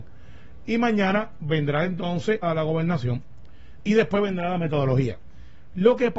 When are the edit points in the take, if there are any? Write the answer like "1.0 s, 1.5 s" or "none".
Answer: 2.4 s